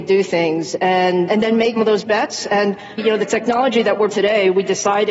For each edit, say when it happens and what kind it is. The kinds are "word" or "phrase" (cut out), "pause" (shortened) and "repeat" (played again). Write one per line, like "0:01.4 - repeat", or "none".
0:01.3 - word
0:01.8 - word
0:03.0 - word
0:04.1 - word